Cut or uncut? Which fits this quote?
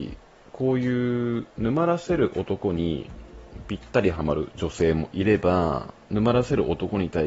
uncut